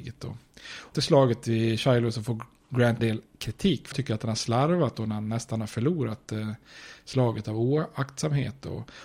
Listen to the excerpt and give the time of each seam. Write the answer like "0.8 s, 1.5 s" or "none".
0.9 s, 3.0 s, 3.9 s

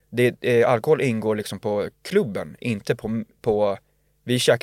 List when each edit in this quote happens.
none

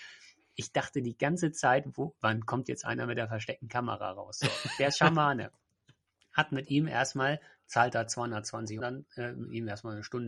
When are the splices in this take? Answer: 8.8 s

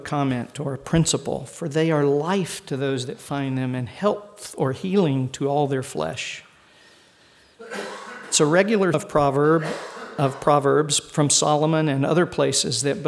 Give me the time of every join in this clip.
8.9 s

